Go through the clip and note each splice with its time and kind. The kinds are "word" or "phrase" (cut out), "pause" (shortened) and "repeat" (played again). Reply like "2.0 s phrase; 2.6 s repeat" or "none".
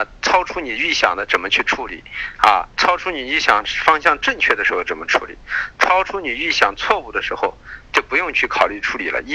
2.7 s pause

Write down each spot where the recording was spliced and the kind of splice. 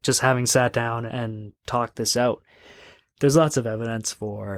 1.1 s word

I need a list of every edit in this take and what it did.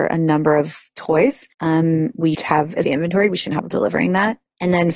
1.5 s pause; 2.3 s word; 2.8 s phrase; 3.7 s word

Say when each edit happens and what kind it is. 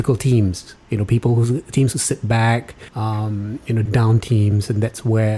2.9 s pause; 3.9 s phrase

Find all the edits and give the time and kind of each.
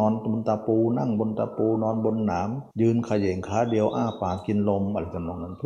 2.7 s pause

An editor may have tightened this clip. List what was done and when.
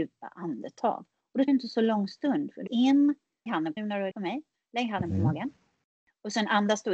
1.5 s word; 2.7 s word; 3.5 s word; 3.8 s word; 4.1 s word

